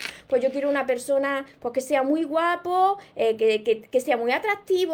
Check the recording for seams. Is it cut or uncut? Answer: uncut